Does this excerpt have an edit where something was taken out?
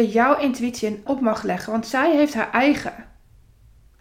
yes; 1 cut; at 1.1 s

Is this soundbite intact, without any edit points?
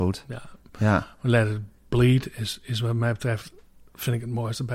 yes; 0 cuts

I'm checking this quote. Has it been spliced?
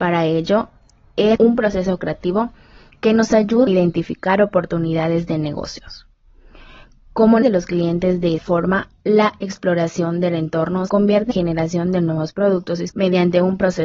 yes; 7 cuts; at 1.4 s, 3.7 s, 7.4 s, 8.4 s, 10.9 s, 11.3 s, 12.9 s

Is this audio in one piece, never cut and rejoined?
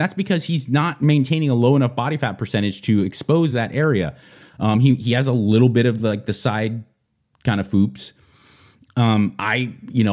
yes; 0 cuts

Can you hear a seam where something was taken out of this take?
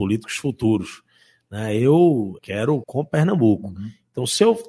yes; 2 cuts; at 2.4 s, 2.8 s

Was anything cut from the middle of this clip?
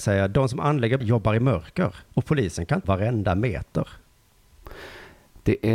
yes; 3 cuts; at 1.0 s, 2.1 s, 2.8 s

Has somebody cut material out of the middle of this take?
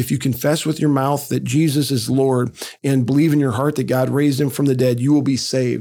yes; 1 cut; at 2.8 s

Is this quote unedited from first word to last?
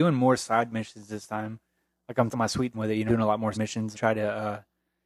no; 5 cuts; at 2.3 s, 2.7 s, 3.1 s, 3.5 s, 3.9 s

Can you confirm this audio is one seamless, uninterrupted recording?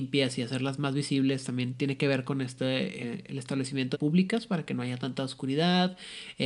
no; 2 cuts; at 3.0 s, 3.9 s

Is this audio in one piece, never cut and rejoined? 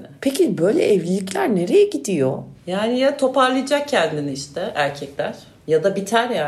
yes; 0 cuts

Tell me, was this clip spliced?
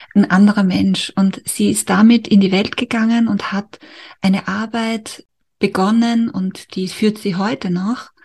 no; 0 cuts

